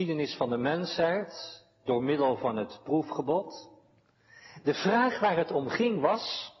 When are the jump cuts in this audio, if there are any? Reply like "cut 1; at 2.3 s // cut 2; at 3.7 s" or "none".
none